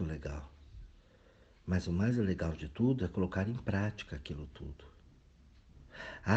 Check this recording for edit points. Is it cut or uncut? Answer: uncut